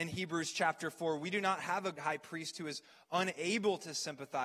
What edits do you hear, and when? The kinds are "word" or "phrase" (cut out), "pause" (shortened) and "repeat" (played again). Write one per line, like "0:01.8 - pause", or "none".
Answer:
0:02.0 - word